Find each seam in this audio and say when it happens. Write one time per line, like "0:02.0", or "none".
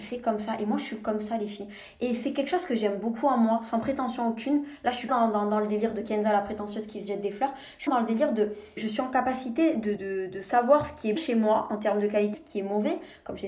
0:05.1
0:07.9
0:08.8
0:10.0
0:11.2
0:12.3